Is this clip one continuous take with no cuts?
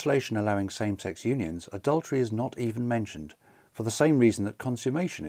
yes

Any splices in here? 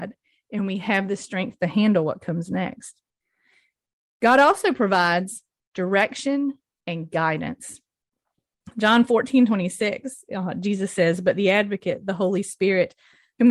no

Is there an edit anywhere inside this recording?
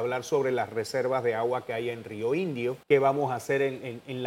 yes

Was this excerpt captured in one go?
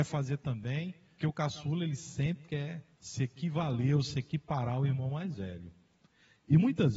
no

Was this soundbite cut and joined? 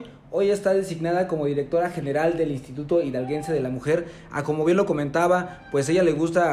no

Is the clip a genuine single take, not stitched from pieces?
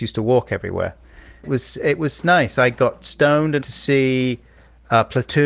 no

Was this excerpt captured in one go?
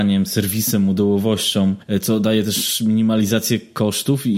yes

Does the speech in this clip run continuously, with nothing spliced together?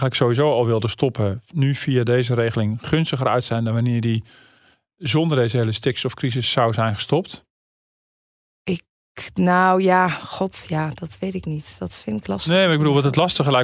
yes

